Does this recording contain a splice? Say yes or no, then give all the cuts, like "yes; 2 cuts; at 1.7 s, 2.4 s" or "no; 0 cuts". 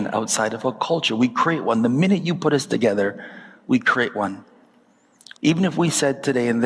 yes; 1 cut; at 5.4 s